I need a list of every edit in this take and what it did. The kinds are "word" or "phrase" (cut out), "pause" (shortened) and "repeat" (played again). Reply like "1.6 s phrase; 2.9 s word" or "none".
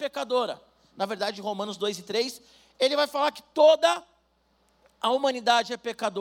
none